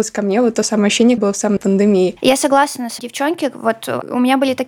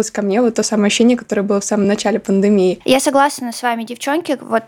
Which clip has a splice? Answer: first; 3 cuts; at 1.2 s, 1.6 s, 3.0 s

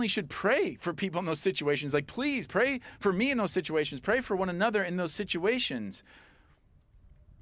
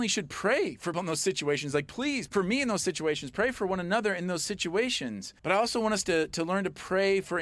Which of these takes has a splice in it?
second; 3 cuts; at 0.9 s, 2.3 s, 5.4 s

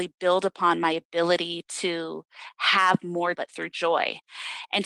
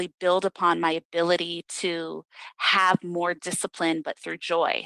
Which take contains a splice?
first; 1 cut; at 3.3 s

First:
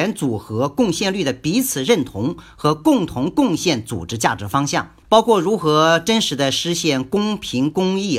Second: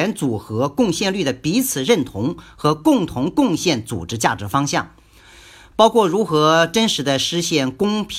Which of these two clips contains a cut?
first; 1 cut; at 5.0 s

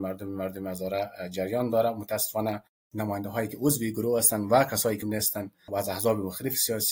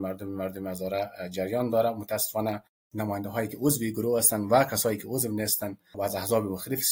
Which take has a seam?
first; 1 cut; at 5.0 s

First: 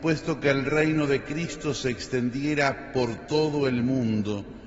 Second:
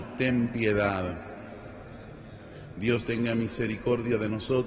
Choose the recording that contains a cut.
second; 1 cut; at 3.0 s

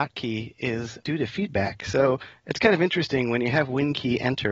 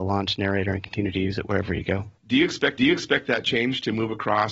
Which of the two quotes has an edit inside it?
second; 2 cuts; at 2.2 s, 2.8 s

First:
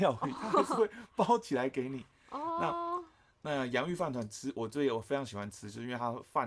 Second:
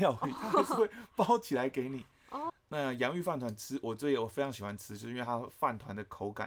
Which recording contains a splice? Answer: second; 1 cut; at 2.5 s

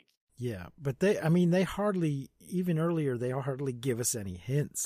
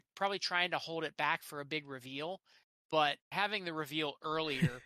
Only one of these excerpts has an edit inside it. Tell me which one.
second; 1 cut; at 3.2 s

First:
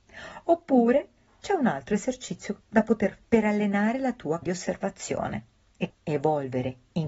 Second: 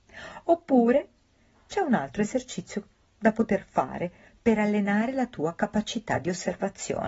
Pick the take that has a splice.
first; 5 cuts; at 1.2 s, 2.6 s, 3.2 s, 4.4 s, 5.9 s

